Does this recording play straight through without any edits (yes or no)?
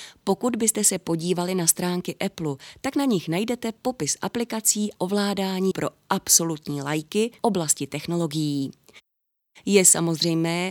no